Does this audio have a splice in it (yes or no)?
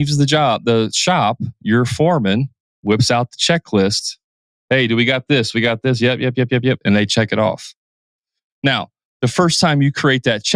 no